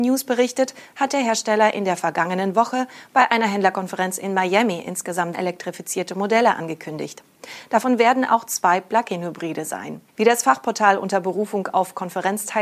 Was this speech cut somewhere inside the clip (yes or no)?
yes